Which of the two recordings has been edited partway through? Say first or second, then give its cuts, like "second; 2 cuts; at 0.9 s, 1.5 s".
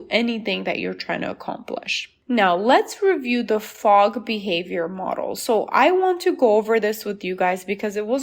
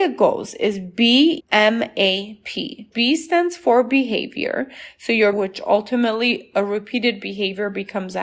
second; 3 cuts; at 1.4 s, 2.9 s, 5.3 s